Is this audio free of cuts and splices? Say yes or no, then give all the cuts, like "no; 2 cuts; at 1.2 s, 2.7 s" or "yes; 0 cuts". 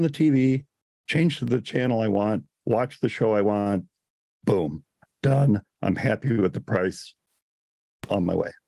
yes; 0 cuts